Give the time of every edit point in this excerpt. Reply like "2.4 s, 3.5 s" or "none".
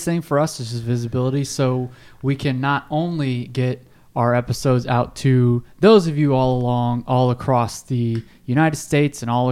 none